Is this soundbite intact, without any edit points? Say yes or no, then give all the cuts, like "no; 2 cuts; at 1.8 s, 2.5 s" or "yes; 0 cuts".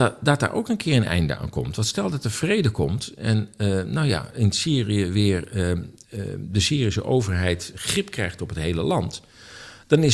yes; 0 cuts